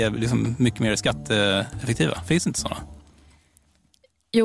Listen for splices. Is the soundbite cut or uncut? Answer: uncut